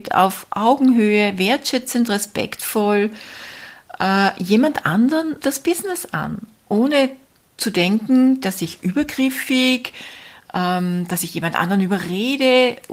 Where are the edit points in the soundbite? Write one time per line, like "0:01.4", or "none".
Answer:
0:05.4